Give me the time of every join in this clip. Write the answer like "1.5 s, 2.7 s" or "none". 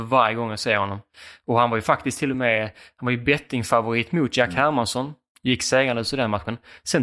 none